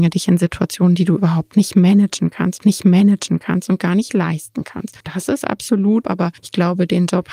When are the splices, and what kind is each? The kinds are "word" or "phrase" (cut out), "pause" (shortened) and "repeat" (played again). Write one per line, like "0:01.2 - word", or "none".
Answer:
0:02.6 - repeat
0:05.0 - pause
0:06.0 - phrase
0:06.4 - pause